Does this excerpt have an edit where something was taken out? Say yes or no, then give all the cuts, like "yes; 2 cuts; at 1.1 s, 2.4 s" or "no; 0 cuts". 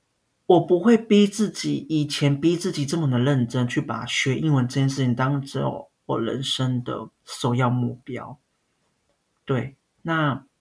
no; 0 cuts